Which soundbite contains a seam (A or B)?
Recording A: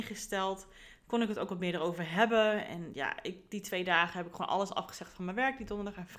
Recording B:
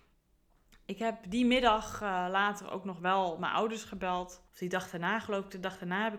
B